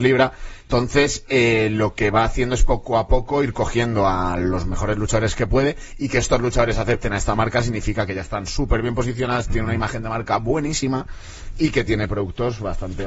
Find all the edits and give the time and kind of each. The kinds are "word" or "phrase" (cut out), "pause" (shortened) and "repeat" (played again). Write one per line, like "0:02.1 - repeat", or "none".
none